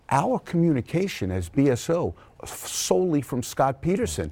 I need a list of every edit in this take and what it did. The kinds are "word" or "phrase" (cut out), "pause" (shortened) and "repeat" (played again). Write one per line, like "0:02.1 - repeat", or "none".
0:02.4 - word